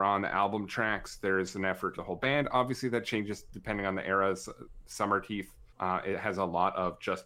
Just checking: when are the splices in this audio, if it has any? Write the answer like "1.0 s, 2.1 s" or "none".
2.0 s, 5.7 s